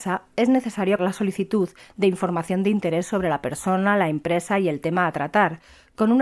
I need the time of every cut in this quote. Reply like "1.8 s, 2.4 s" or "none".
1.0 s